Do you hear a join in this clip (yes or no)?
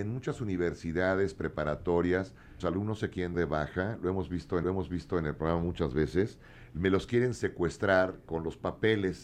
yes